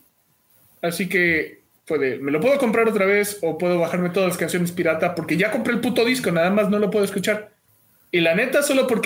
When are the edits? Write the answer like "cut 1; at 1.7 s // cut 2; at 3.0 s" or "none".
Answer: cut 1; at 7.7 s